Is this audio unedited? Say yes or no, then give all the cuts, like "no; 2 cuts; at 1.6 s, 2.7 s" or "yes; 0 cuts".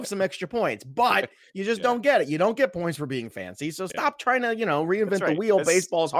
yes; 0 cuts